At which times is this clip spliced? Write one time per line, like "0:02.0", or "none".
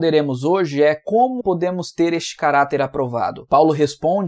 0:01.4